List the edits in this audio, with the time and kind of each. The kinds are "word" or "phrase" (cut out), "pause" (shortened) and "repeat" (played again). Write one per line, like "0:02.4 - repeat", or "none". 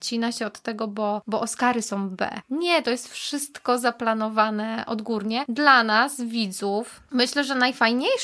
none